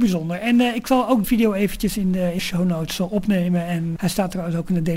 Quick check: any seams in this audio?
yes; 3 cuts; at 1.2 s, 2.4 s, 4.0 s

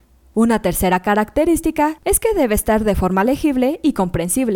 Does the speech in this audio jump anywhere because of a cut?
no; 0 cuts

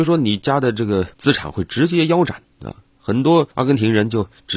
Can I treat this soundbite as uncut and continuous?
no; 3 cuts; at 1.1 s, 2.5 s, 3.5 s

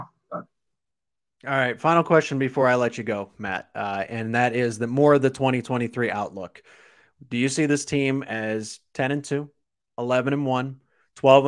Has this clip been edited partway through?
no; 0 cuts

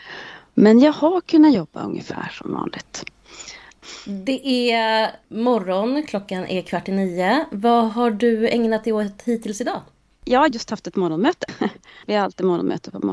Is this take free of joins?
yes; 0 cuts

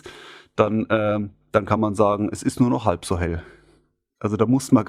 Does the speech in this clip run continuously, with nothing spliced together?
yes; 0 cuts

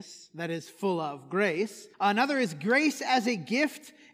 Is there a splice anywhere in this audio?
yes; 1 cut; at 1.9 s

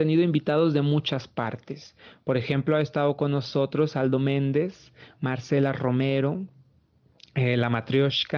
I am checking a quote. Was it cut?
no; 0 cuts

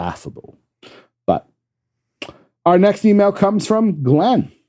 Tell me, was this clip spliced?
no; 0 cuts

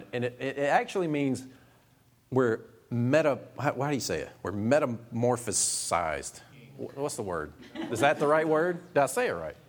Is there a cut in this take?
no; 0 cuts

